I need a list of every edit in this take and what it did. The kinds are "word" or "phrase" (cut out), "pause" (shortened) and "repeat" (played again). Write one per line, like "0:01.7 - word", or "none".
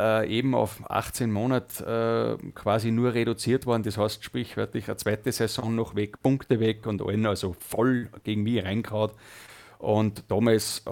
none